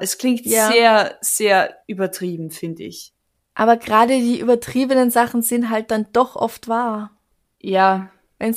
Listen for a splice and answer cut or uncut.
uncut